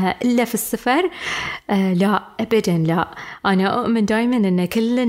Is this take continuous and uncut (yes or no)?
yes